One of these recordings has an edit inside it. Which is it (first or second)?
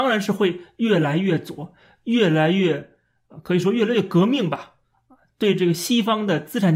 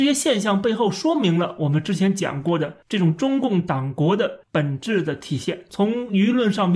second